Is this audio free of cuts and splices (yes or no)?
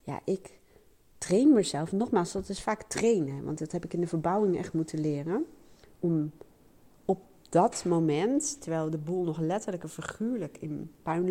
yes